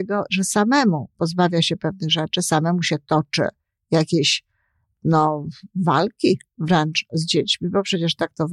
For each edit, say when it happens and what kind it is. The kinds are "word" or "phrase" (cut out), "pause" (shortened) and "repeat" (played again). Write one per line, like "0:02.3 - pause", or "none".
none